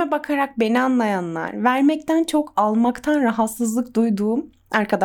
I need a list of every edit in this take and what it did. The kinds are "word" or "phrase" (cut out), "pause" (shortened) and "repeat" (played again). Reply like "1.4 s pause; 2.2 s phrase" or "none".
none